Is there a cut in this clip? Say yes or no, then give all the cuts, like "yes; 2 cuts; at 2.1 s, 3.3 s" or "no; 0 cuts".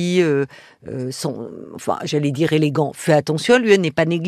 no; 0 cuts